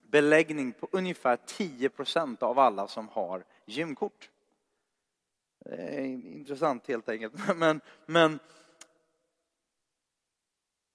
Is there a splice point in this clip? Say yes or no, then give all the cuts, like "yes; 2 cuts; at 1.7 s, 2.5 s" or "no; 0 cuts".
no; 0 cuts